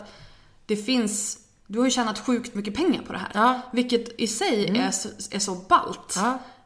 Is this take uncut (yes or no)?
yes